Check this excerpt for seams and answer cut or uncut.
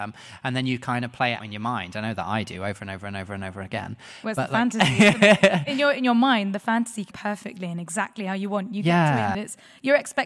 cut